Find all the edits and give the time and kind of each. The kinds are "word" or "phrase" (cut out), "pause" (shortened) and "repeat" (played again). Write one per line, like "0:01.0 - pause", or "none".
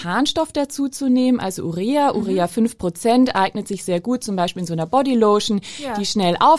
none